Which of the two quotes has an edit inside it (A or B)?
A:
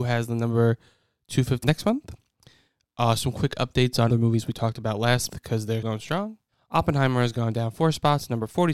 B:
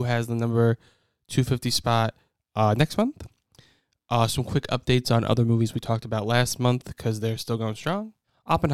A